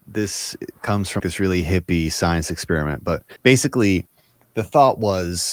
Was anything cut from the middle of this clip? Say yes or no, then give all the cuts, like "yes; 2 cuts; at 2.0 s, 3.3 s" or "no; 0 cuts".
yes; 2 cuts; at 1.2 s, 3.4 s